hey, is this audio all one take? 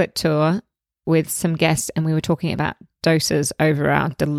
yes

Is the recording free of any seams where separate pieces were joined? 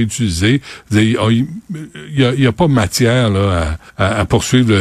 no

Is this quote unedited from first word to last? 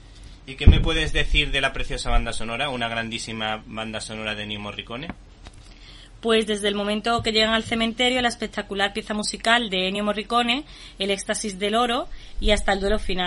yes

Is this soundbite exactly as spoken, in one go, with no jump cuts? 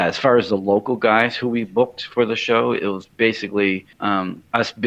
no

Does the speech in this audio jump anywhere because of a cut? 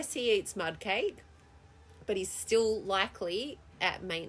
no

